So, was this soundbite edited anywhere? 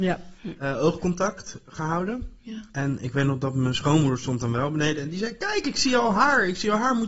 no; 0 cuts

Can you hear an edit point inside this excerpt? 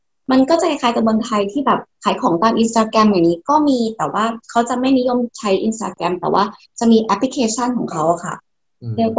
yes; 1 cut; at 5.3 s

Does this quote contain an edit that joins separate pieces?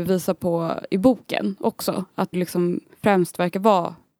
yes; 1 cut; at 2.3 s

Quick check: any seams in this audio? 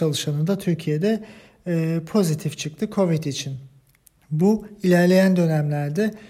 no; 0 cuts

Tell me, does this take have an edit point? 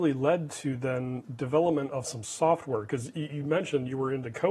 yes; 1 cut; at 1.2 s

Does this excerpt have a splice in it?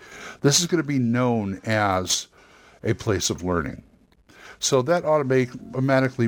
no; 0 cuts

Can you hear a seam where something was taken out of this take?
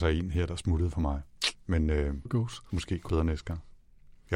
yes; 3 cuts; at 2.3 s, 2.7 s, 3.1 s

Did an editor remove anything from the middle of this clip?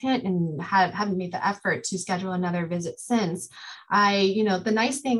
no; 0 cuts

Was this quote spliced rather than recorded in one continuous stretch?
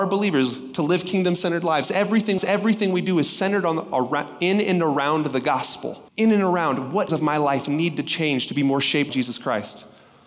yes; 4 cuts; at 2.4 s, 6.1 s, 7.1 s, 9.1 s

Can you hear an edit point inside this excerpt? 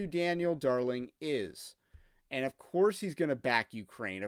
no; 0 cuts

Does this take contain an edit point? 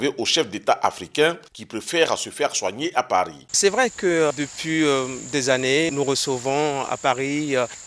no; 0 cuts

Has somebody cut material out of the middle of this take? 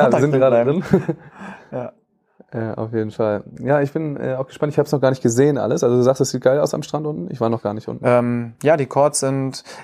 no; 0 cuts

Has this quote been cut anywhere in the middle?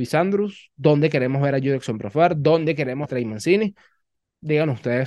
yes; 1 cut; at 3.0 s

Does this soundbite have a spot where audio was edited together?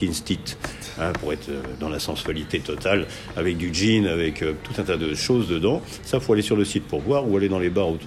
no; 0 cuts

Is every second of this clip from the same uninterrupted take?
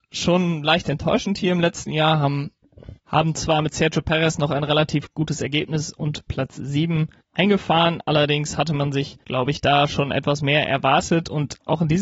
no; 2 cuts; at 3.0 s, 9.2 s

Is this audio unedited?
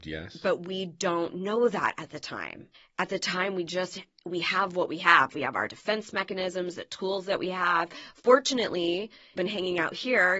no; 2 cuts; at 2.7 s, 9.4 s

